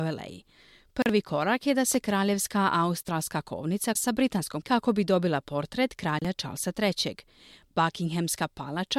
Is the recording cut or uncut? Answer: cut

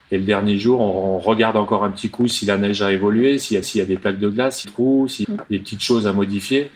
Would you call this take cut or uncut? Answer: cut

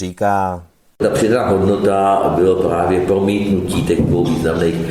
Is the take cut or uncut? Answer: uncut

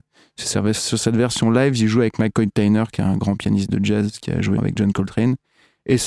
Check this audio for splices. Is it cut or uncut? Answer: cut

